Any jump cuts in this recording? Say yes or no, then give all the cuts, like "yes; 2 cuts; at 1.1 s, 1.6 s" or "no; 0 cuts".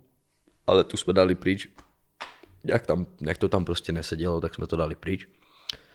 no; 0 cuts